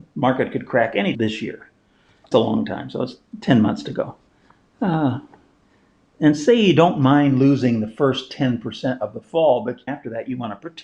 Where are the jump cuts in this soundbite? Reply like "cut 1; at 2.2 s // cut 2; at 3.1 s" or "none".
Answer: cut 1; at 1.1 s // cut 2; at 2.3 s // cut 3; at 9.9 s